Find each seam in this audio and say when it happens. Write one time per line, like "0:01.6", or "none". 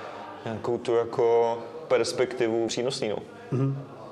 0:02.7